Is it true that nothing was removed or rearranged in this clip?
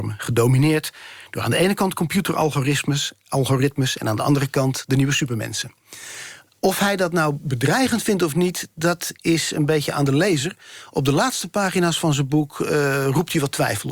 yes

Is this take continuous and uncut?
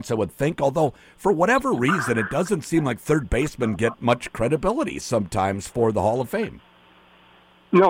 yes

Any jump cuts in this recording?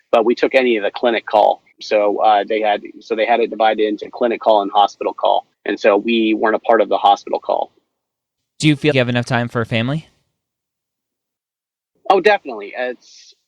yes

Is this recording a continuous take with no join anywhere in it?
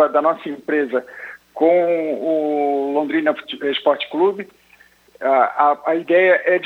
yes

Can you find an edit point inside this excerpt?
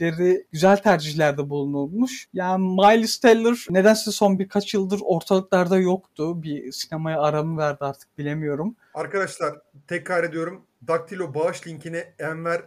no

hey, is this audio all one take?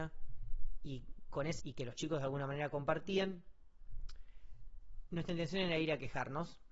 no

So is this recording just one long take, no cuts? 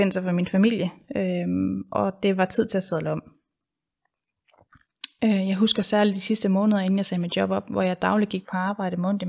yes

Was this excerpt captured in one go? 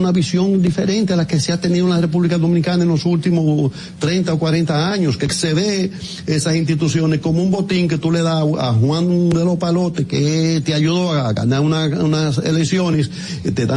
yes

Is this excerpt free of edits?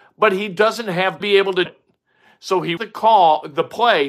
no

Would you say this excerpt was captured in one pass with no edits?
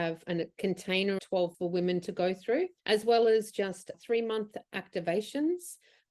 no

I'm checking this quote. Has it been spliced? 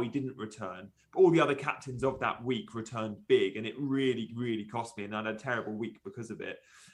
no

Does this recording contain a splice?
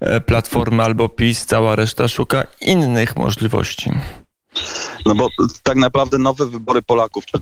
no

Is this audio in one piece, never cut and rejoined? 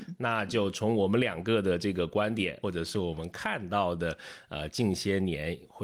yes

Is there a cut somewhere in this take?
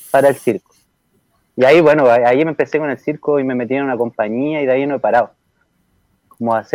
no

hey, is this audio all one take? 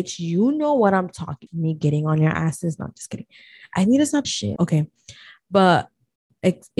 no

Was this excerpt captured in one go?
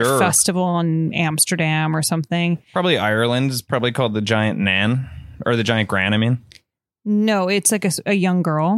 yes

